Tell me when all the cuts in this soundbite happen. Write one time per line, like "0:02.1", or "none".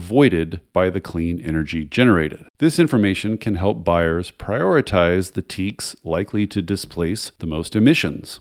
0:02.5